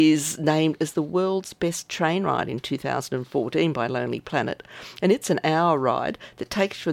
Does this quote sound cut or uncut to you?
uncut